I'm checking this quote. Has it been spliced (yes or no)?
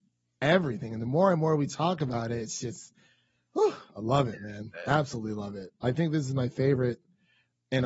no